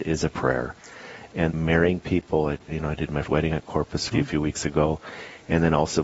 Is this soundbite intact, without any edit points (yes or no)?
no